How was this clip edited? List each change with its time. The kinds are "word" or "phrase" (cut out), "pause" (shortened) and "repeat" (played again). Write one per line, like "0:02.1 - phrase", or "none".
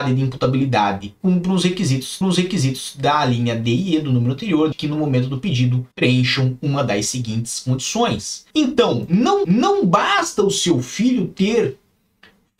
0:01.2 - word
0:02.2 - repeat
0:04.7 - word
0:05.9 - pause
0:08.5 - pause
0:09.4 - repeat